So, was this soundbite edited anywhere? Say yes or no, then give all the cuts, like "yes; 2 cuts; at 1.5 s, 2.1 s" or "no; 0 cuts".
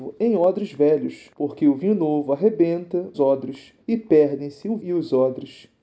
yes; 4 cuts; at 1.3 s, 3.1 s, 3.8 s, 4.8 s